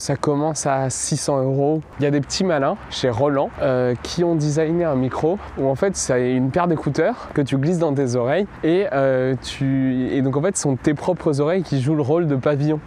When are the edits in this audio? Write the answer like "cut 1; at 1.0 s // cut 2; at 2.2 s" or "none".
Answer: none